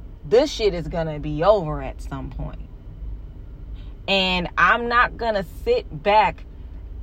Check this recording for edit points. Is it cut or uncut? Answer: uncut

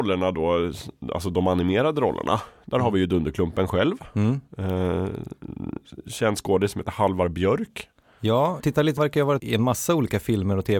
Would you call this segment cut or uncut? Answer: cut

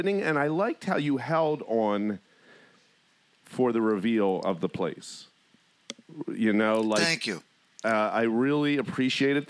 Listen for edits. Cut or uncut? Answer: uncut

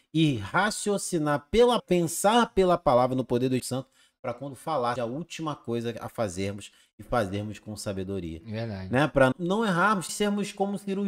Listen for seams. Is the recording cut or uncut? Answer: cut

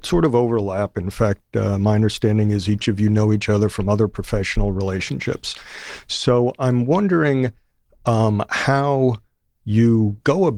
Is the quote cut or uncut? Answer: uncut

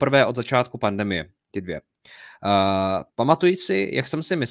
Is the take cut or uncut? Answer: cut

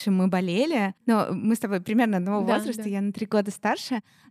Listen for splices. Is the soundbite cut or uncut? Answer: cut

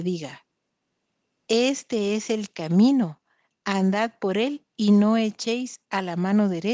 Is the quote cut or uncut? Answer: uncut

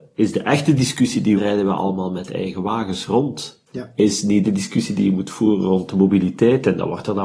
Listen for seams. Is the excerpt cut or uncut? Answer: cut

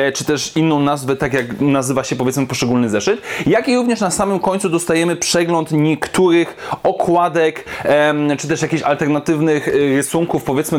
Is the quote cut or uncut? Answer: uncut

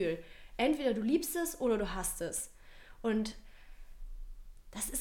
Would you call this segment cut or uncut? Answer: uncut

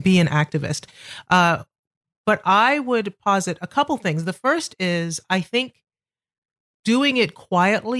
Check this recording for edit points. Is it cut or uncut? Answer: uncut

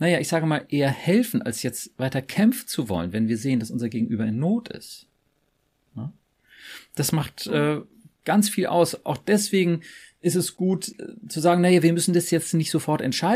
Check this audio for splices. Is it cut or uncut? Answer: uncut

